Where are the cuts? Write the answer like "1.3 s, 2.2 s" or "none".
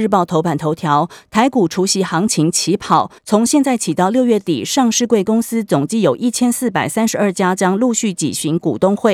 3.2 s

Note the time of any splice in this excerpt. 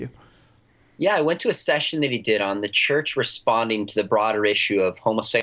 none

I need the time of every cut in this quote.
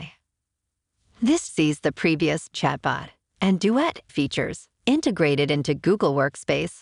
1.5 s, 2.5 s, 4.1 s

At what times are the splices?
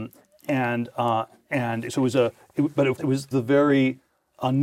1.8 s, 3.0 s, 3.3 s

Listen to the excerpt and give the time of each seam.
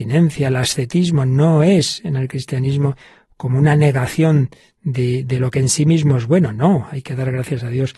none

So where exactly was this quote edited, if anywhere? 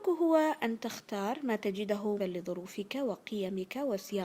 2.2 s

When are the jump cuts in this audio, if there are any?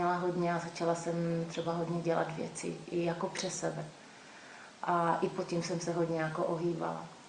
none

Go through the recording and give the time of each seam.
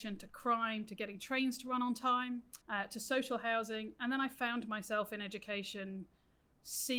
2.6 s

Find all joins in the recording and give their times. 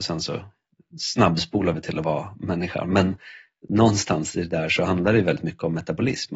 none

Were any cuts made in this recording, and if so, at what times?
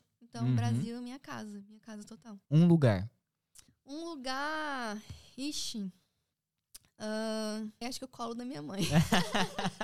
2.4 s, 3.7 s, 7.8 s

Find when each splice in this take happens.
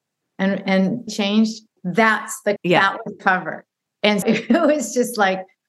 1.1 s, 1.8 s, 2.6 s, 3.2 s, 4.2 s

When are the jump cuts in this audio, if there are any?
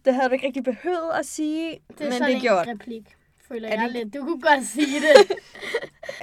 1.8 s, 2.7 s

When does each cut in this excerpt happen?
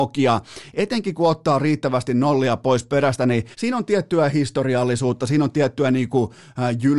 3.5 s

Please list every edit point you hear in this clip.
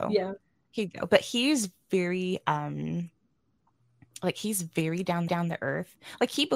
5.3 s

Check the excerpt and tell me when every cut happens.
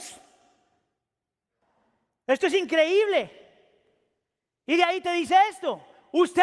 none

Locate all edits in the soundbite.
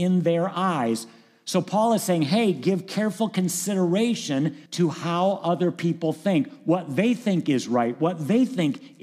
4.7 s

